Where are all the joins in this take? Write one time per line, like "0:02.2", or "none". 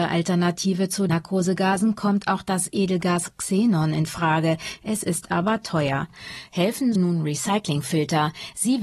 0:01.1
0:07.0